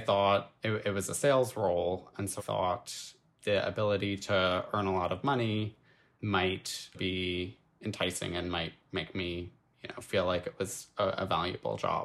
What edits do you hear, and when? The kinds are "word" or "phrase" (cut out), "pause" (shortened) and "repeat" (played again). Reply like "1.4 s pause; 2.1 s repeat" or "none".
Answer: 2.4 s word; 6.9 s word